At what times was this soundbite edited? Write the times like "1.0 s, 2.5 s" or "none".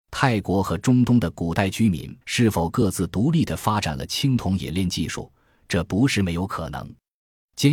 2.2 s